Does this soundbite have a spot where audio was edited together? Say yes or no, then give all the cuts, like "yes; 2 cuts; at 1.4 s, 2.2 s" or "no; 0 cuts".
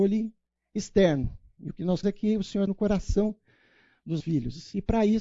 yes; 3 cuts; at 2.0 s, 2.7 s, 4.2 s